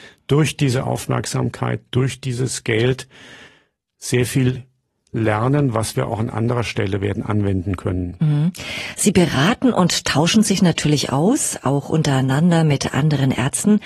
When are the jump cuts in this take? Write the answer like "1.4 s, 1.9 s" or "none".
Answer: none